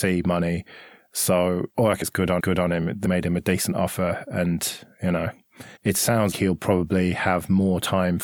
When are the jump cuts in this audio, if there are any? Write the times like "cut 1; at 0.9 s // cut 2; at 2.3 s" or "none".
cut 1; at 1.7 s // cut 2; at 2.0 s // cut 3; at 2.4 s // cut 4; at 3.0 s // cut 5; at 5.8 s // cut 6; at 6.3 s